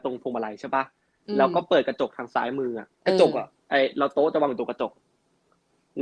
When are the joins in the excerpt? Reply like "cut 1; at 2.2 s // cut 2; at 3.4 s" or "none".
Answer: cut 1; at 2.9 s